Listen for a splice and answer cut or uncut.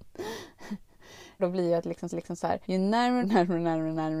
cut